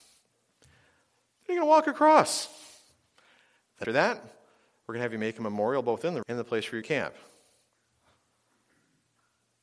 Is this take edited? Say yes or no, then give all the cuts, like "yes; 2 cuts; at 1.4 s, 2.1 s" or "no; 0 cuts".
yes; 3 cuts; at 3.8 s, 6.2 s, 6.8 s